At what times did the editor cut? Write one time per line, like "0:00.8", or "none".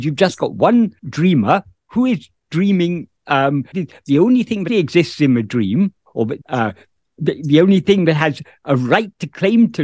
0:01.0
0:03.7
0:04.7
0:06.4